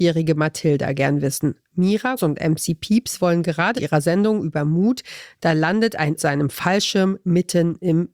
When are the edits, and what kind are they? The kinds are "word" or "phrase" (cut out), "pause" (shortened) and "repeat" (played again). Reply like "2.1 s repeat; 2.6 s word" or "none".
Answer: 2.2 s word; 3.8 s phrase; 6.2 s phrase